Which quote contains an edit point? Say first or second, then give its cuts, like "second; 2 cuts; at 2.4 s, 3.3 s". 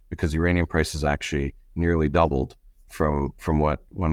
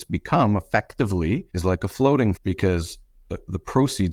second; 2 cuts; at 1.5 s, 2.4 s